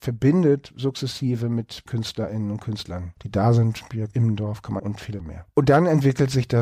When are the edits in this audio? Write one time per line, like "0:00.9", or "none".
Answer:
0:01.9
0:03.2
0:04.8
0:05.2